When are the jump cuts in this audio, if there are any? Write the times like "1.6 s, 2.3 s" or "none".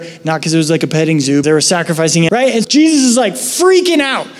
1.4 s, 2.3 s, 2.6 s